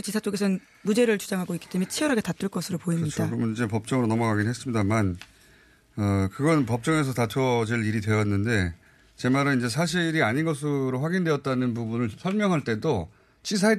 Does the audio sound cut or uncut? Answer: uncut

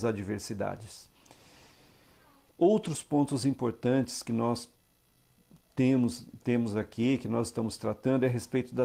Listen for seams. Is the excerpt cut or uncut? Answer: uncut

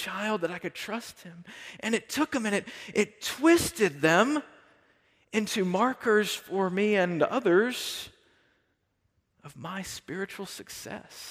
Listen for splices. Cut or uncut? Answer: uncut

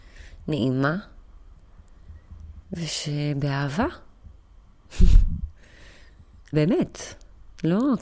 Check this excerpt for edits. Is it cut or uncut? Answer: cut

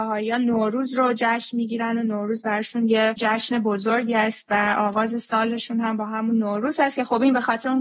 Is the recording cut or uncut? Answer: uncut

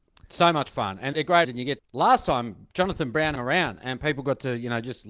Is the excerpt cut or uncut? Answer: cut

